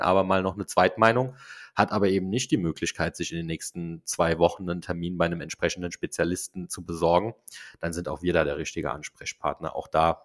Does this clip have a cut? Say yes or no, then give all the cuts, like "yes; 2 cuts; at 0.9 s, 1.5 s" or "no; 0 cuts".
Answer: no; 0 cuts